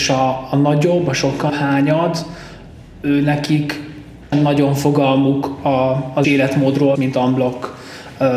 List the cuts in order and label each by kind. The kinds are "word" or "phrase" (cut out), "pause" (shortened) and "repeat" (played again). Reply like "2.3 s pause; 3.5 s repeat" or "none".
1.5 s word; 4.3 s word; 6.2 s word; 7.0 s word